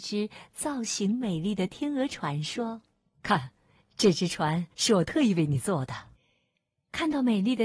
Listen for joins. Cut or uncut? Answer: cut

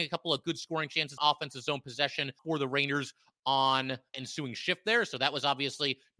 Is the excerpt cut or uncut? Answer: cut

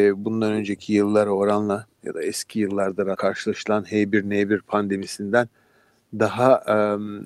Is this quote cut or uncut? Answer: cut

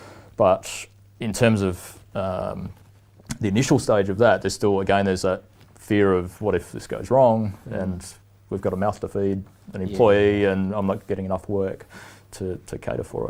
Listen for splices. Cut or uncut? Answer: uncut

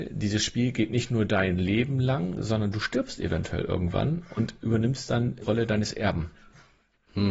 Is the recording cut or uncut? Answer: cut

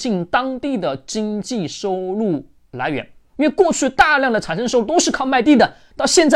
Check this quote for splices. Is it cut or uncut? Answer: uncut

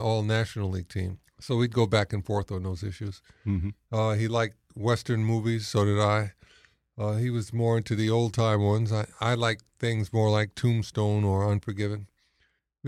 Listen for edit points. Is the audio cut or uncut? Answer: uncut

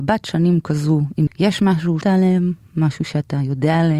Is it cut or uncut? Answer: cut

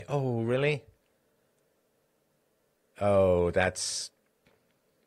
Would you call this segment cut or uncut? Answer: uncut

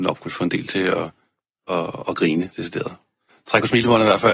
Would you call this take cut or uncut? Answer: uncut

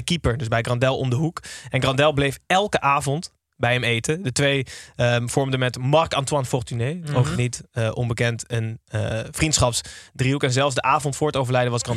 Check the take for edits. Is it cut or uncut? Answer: uncut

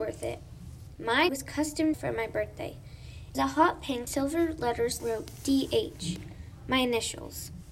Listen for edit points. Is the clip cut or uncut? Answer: cut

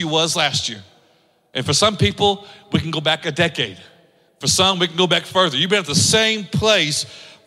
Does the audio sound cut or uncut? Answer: uncut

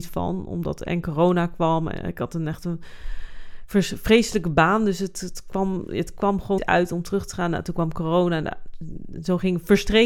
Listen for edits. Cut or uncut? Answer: cut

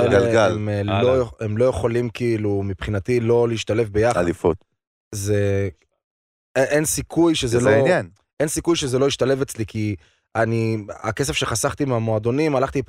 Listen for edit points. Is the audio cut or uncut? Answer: uncut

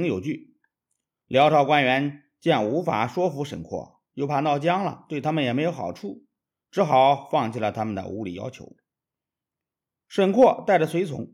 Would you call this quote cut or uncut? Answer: cut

